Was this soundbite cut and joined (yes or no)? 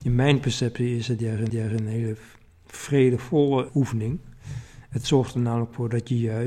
yes